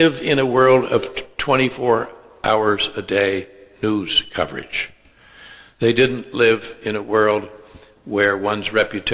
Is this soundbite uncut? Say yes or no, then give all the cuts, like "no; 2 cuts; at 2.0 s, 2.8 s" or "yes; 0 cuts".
yes; 0 cuts